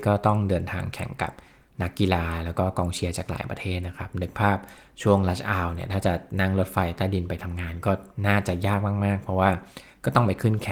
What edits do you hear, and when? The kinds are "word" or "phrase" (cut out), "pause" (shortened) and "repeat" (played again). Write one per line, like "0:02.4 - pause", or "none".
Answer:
none